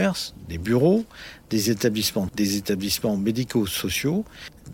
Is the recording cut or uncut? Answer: cut